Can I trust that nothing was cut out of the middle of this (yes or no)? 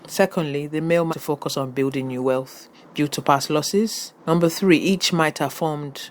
no